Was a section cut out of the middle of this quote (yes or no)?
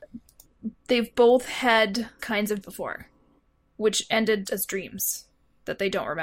yes